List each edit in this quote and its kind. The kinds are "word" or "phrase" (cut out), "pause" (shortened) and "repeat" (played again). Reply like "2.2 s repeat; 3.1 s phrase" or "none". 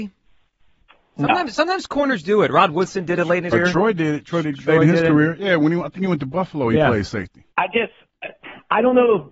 2.2 s word; 3.5 s word; 4.4 s phrase; 7.5 s pause